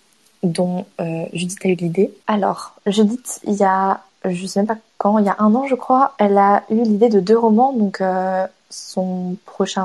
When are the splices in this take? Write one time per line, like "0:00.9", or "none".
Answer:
0:02.2